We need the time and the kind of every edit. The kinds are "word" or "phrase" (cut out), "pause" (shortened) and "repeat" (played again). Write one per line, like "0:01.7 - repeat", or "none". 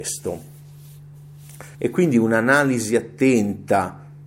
0:01.7 - pause